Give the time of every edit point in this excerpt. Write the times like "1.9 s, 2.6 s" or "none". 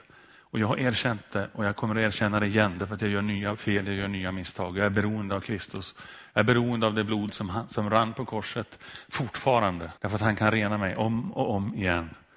10.0 s